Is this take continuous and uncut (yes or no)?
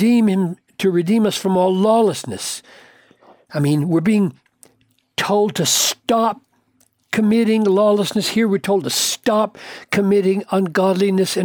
yes